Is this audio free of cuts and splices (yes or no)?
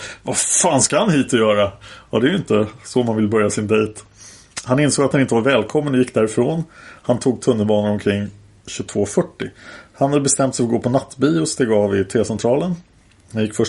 yes